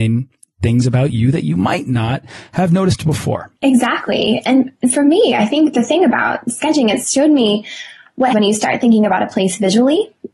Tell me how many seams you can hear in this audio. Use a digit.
2